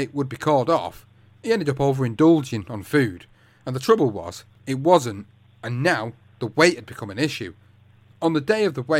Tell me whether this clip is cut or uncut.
uncut